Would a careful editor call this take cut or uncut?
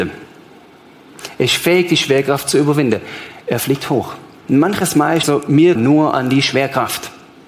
cut